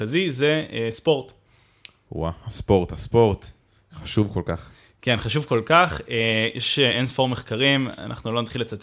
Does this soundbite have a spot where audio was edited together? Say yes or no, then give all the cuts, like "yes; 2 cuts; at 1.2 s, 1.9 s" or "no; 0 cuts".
no; 0 cuts